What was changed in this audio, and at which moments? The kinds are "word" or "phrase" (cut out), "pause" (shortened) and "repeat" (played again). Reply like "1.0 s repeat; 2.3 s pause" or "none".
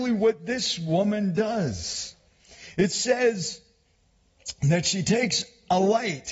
none